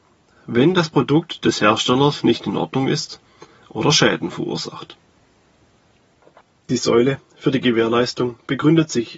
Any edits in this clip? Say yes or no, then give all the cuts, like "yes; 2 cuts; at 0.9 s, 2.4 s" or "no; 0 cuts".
no; 0 cuts